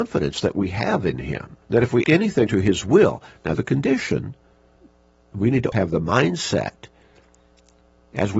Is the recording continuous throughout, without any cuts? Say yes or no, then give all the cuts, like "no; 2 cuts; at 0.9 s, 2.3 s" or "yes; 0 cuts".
no; 6 cuts; at 1.6 s, 2.0 s, 2.5 s, 3.5 s, 4.8 s, 5.7 s